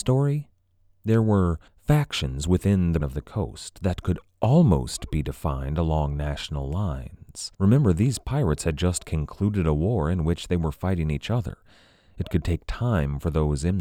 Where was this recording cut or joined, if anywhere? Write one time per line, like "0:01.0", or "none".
0:01.7
0:03.0
0:07.5